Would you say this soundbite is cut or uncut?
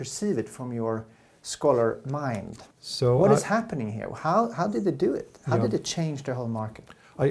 cut